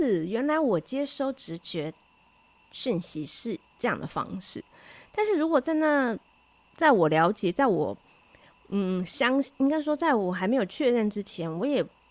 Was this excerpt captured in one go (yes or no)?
yes